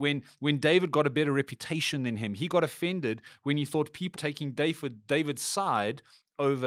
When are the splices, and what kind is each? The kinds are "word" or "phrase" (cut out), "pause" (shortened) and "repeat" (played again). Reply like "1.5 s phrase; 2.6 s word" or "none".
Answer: 4.1 s word